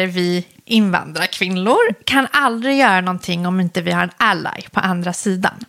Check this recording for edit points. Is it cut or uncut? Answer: uncut